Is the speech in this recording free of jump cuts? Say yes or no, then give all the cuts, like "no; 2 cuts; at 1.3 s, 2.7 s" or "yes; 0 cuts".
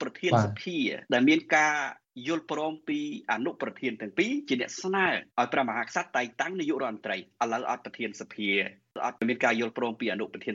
no; 2 cuts; at 1.0 s, 5.3 s